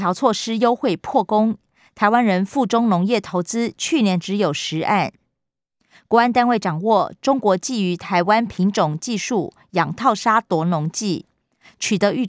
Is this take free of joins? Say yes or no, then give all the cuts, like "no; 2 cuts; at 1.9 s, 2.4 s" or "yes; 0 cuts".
yes; 0 cuts